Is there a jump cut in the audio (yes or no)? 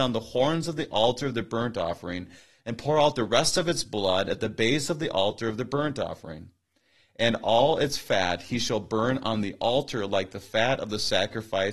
no